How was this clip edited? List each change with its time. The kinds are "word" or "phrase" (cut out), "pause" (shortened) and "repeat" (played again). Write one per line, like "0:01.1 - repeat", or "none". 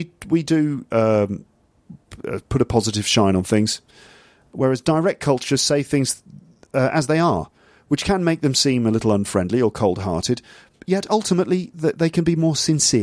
none